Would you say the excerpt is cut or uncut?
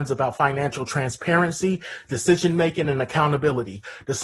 uncut